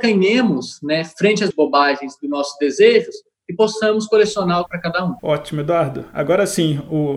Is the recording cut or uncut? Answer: cut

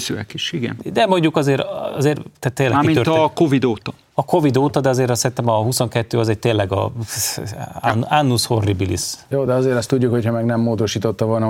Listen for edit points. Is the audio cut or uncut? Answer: uncut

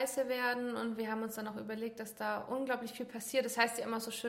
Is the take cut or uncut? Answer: uncut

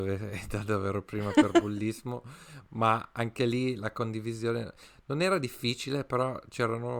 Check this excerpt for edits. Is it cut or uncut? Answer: uncut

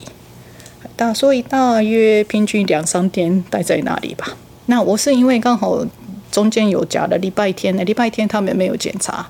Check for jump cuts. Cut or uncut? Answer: cut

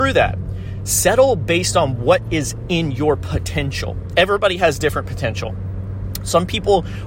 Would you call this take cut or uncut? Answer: uncut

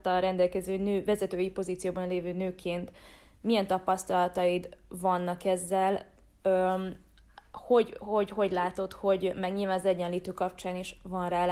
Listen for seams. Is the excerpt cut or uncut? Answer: uncut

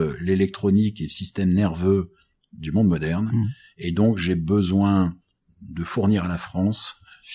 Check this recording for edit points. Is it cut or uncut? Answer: uncut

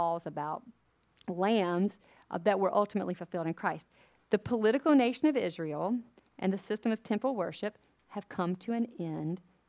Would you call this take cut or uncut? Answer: uncut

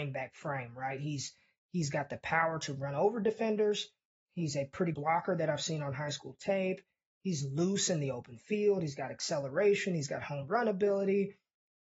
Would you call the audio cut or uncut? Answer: cut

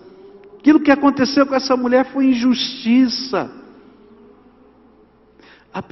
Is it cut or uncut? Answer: uncut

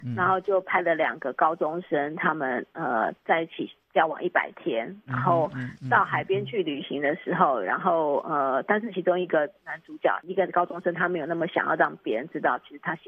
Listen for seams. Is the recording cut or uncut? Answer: uncut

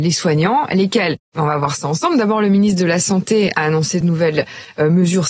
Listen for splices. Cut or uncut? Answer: uncut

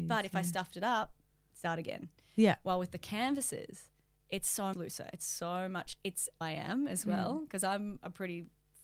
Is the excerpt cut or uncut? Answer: cut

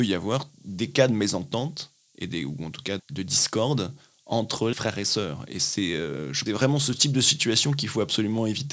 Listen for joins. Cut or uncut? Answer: cut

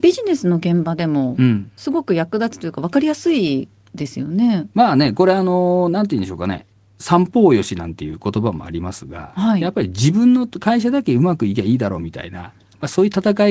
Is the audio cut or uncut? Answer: cut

